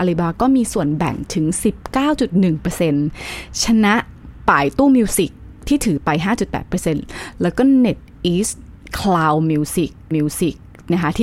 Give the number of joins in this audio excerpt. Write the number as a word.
one